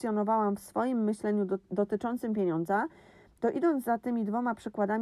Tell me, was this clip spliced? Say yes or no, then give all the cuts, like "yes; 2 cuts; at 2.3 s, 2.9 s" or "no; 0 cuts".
no; 0 cuts